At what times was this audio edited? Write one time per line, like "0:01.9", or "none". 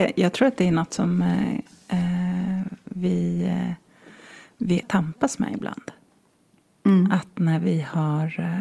0:04.8